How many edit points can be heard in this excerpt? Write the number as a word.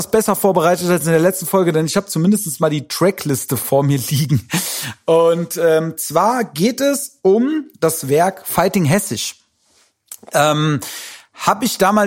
one